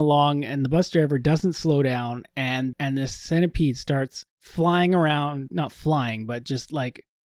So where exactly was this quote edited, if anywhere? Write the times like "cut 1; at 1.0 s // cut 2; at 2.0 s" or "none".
cut 1; at 2.7 s // cut 2; at 4.3 s // cut 3; at 5.5 s